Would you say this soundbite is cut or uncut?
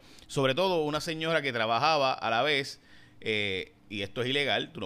uncut